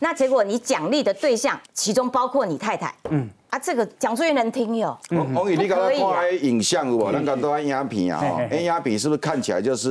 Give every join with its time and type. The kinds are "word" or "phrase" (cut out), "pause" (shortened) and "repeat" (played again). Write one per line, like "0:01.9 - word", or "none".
0:01.6 - pause
0:03.9 - pause